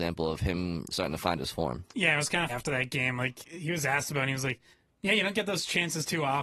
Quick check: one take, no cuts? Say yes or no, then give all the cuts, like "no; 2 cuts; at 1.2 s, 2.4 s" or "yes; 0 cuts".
no; 4 cuts; at 0.9 s, 1.9 s, 2.5 s, 4.7 s